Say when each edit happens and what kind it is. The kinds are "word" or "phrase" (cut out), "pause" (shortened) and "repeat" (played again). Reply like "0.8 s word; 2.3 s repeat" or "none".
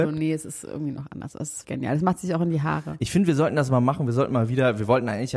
1.6 s word